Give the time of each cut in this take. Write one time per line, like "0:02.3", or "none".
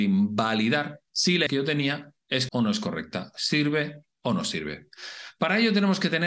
0:01.1
0:01.5
0:02.5